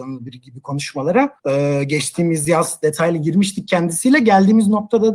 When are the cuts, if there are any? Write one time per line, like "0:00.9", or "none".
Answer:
0:01.4